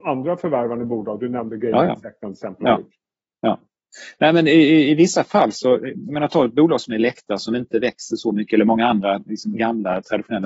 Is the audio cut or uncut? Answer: uncut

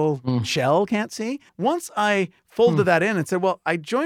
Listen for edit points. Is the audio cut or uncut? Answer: cut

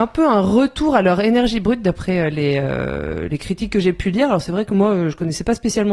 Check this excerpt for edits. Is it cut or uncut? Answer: uncut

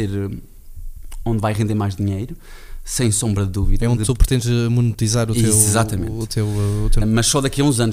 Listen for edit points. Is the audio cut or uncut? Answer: cut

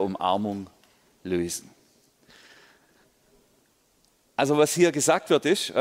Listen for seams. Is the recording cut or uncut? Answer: uncut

